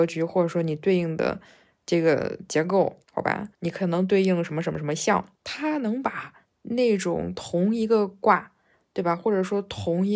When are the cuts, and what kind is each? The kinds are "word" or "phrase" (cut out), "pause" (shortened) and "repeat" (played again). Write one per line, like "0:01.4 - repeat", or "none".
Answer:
0:03.0 - pause
0:03.5 - pause
0:05.3 - pause